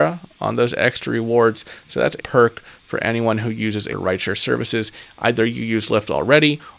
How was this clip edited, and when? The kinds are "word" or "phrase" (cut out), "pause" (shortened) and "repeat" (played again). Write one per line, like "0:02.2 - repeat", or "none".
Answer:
0:02.2 - phrase
0:03.9 - word